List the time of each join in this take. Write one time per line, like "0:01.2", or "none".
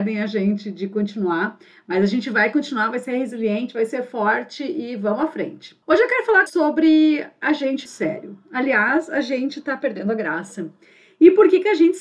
0:05.8
0:06.5
0:07.9